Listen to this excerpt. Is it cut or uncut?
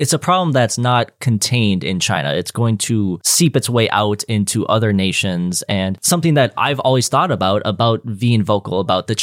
uncut